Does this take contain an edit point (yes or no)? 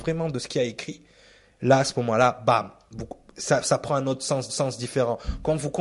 yes